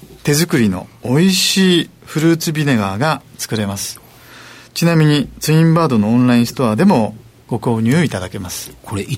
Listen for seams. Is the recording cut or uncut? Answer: uncut